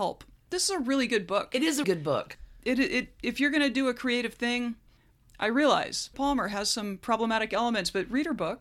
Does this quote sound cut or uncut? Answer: cut